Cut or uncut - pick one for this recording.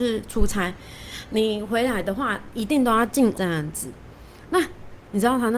cut